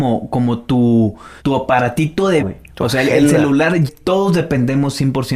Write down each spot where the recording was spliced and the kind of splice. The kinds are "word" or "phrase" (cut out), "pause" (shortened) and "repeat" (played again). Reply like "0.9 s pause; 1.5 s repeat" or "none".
1.4 s pause; 2.4 s word; 3.9 s phrase